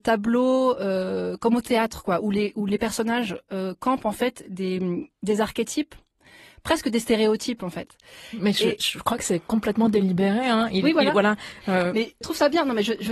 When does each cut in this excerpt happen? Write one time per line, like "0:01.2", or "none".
0:12.2